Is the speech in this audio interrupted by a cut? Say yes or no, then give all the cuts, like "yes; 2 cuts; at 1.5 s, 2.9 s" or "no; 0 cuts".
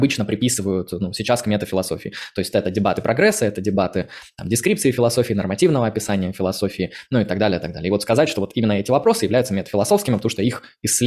no; 0 cuts